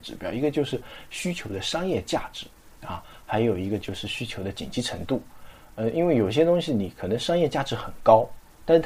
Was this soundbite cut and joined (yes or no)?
yes